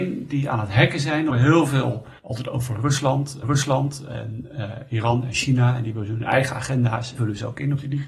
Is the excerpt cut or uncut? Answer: cut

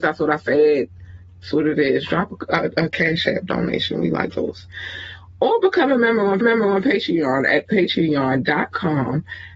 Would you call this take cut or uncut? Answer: cut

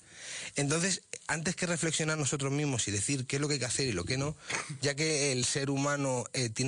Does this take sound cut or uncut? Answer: uncut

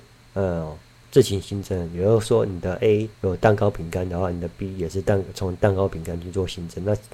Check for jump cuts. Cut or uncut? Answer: cut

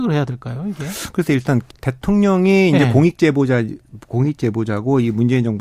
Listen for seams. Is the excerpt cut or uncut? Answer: cut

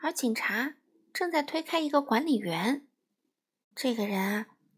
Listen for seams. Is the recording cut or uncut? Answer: uncut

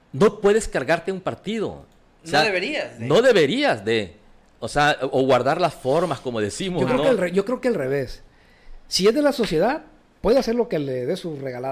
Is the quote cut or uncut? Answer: uncut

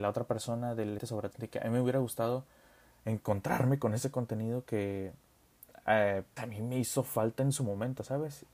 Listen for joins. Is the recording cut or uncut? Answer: cut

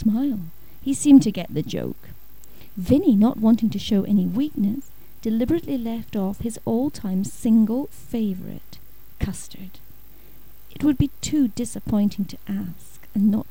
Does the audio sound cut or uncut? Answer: uncut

